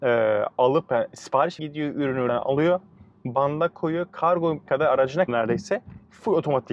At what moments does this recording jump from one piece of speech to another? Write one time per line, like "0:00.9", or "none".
0:01.6
0:02.3
0:04.7
0:05.3